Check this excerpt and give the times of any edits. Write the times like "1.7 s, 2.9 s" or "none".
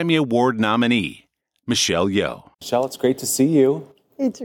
2.5 s